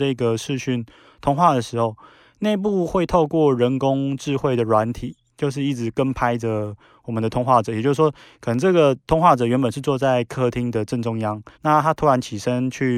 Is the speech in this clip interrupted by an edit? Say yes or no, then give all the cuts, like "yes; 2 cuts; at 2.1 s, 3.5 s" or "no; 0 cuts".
yes; 1 cut; at 11.5 s